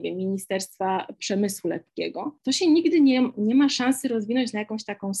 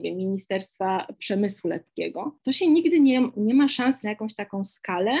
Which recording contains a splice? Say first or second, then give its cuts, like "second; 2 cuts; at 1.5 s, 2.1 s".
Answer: second; 1 cut; at 4.0 s